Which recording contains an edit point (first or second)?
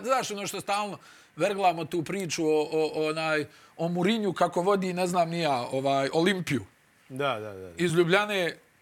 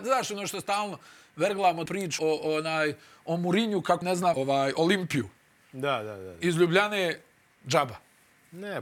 second